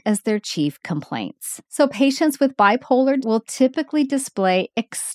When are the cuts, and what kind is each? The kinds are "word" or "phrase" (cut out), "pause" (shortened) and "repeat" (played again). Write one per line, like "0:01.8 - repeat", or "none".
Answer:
0:01.7 - pause
0:03.2 - word